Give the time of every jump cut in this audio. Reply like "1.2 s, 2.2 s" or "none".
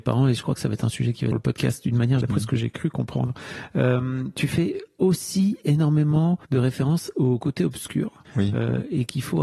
1.3 s, 2.2 s, 6.4 s, 8.2 s